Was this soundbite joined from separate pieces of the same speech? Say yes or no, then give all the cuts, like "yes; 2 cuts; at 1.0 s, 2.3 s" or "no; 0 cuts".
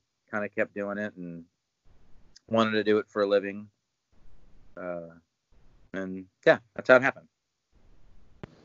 no; 0 cuts